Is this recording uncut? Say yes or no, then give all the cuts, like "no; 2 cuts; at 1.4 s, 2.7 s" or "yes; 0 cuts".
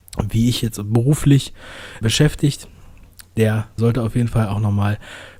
no; 2 cuts; at 2.0 s, 3.8 s